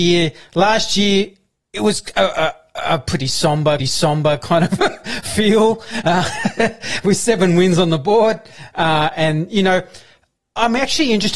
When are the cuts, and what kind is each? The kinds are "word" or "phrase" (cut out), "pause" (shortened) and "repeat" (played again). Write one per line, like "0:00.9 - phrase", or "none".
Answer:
0:03.8 - repeat